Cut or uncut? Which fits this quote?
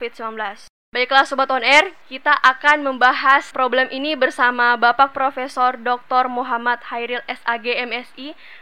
cut